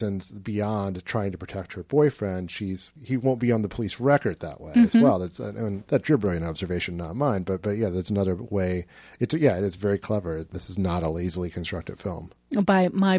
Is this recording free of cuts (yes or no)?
yes